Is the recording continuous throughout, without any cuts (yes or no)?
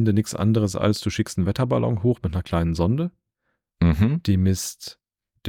yes